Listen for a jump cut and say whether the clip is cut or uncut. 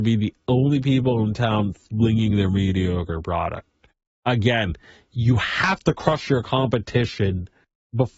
uncut